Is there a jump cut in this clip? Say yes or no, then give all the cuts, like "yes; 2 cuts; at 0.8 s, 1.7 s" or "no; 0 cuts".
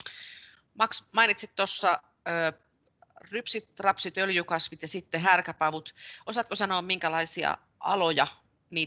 no; 0 cuts